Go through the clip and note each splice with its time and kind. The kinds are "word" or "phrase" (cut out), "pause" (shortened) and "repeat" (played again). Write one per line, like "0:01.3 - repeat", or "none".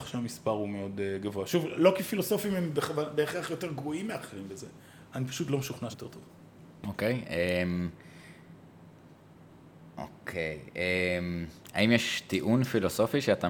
0:05.9 - word